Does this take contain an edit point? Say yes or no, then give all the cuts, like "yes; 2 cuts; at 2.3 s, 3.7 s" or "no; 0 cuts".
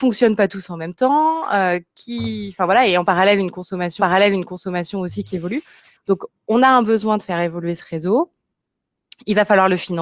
yes; 1 cut; at 4.0 s